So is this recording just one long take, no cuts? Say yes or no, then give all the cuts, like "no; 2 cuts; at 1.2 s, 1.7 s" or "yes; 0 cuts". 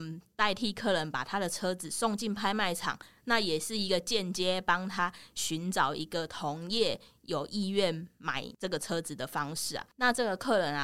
yes; 0 cuts